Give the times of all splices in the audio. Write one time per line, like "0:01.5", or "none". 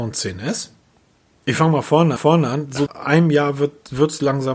0:01.0
0:02.2
0:02.9